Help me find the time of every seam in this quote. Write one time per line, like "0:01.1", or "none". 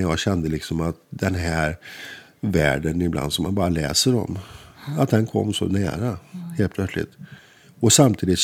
none